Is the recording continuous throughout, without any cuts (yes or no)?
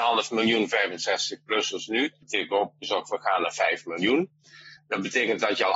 no